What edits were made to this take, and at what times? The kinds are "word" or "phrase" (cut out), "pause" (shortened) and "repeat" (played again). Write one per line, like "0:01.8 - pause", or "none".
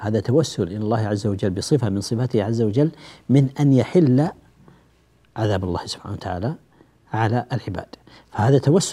none